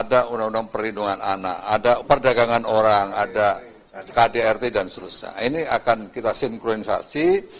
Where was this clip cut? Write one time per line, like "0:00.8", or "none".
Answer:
0:02.0